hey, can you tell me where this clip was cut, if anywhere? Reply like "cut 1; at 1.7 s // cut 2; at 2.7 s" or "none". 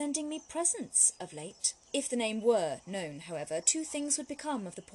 cut 1; at 1.8 s